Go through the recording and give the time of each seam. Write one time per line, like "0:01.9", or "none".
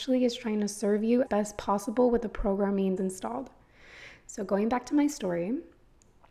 0:01.3
0:03.0